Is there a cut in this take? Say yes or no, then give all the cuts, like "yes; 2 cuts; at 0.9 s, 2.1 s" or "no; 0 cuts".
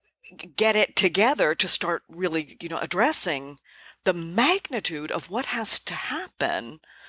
no; 0 cuts